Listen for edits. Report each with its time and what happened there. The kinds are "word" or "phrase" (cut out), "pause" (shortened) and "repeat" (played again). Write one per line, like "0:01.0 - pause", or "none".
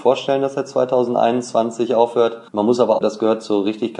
0:02.5 - pause
0:03.0 - word